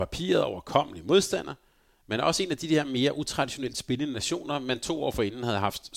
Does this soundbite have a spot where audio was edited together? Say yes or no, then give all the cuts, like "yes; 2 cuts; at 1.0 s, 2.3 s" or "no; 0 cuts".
no; 0 cuts